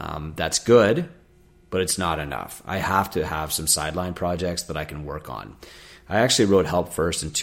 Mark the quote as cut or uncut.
uncut